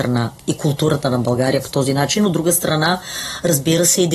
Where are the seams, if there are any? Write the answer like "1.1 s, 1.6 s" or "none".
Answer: none